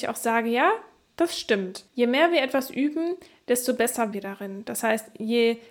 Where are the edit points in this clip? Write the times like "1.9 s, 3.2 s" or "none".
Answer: 1.9 s, 4.1 s